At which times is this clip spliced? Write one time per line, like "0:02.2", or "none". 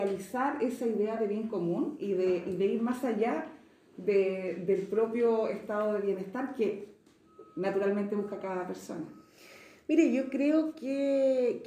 none